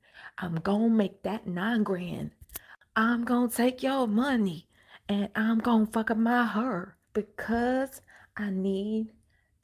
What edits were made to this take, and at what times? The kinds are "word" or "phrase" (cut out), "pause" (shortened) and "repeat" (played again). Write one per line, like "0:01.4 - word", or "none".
0:07.0 - pause